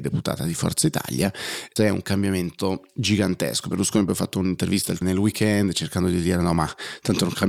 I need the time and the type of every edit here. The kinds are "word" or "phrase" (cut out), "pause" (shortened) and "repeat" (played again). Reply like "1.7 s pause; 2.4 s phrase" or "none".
1.8 s word; 5.0 s word

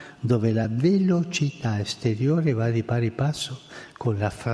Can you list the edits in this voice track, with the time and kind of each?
none

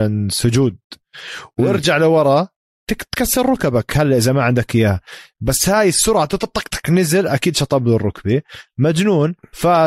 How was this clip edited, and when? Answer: none

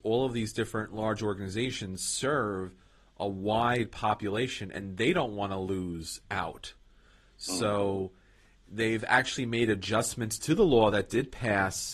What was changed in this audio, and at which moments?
none

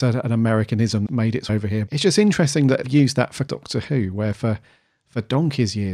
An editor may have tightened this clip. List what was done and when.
1.1 s word; 1.5 s word; 1.9 s word; 2.8 s word; 3.5 s word

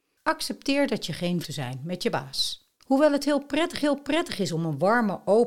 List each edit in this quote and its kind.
1.4 s phrase; 2.8 s pause; 3.8 s repeat

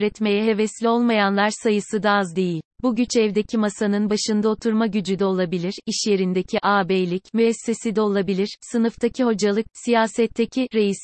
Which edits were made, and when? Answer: 2.7 s pause

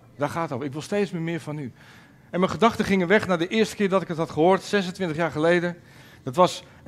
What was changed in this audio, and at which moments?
none

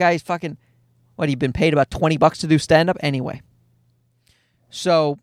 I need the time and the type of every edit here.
none

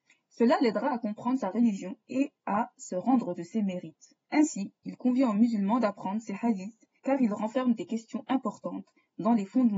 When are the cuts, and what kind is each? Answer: 3.4 s word; 4.2 s pause; 7.0 s pause

